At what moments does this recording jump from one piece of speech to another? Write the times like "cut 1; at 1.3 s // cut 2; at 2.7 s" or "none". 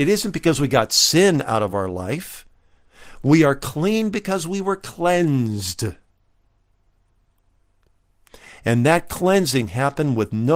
none